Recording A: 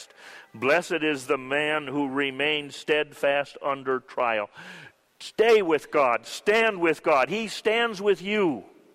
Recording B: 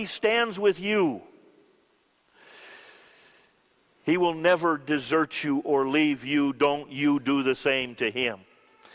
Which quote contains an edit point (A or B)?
A